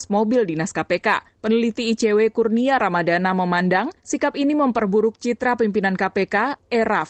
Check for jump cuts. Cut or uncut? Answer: uncut